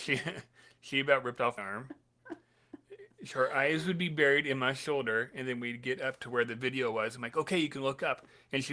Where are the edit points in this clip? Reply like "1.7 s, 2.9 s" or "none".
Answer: 1.6 s